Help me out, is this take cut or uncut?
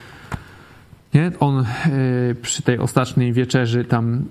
uncut